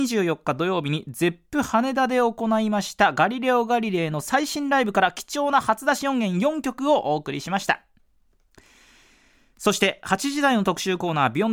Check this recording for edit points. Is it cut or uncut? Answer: uncut